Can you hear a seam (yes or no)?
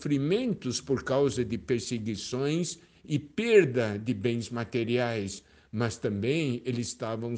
no